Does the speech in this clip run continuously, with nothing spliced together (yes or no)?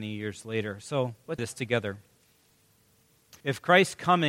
no